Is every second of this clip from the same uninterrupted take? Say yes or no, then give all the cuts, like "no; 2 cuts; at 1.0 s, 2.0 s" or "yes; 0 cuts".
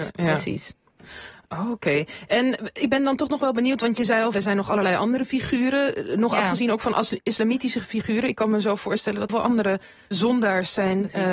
no; 3 cuts; at 4.3 s, 9.3 s, 10.1 s